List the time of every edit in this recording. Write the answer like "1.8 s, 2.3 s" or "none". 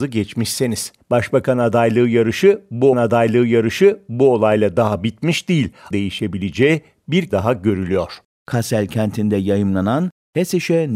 1.0 s, 2.9 s, 5.9 s, 7.3 s